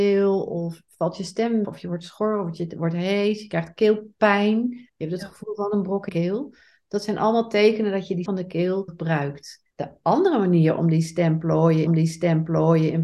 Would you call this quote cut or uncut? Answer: cut